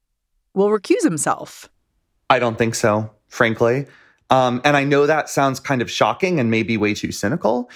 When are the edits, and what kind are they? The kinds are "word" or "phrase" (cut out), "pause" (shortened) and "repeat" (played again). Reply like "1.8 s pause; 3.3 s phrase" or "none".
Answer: none